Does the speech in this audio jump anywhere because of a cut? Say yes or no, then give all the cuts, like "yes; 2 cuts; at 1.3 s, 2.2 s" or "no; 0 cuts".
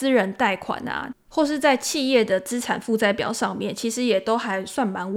no; 0 cuts